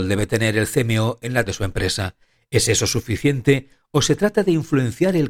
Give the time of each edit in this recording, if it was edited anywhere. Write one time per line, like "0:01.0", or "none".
0:01.5

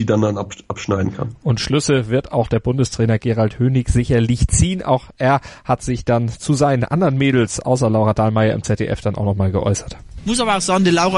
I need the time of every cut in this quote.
none

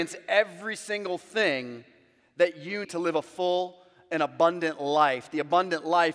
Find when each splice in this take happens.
0:02.8

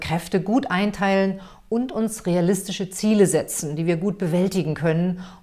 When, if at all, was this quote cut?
none

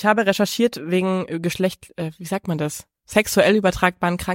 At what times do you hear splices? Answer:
none

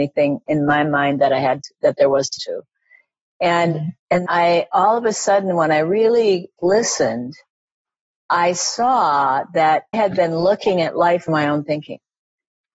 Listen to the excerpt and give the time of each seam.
0:02.4
0:04.3
0:06.6
0:09.9
0:11.3

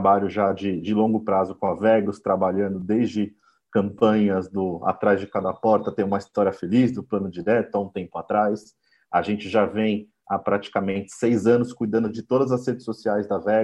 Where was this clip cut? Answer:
none

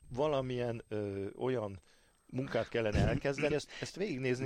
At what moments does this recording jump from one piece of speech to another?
0:03.5

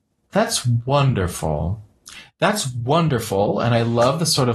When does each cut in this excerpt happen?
none

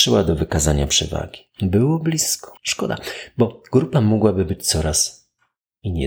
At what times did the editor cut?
0:02.6

